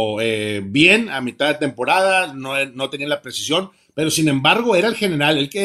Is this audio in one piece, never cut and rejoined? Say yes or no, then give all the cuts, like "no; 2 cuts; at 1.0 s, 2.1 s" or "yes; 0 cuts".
yes; 0 cuts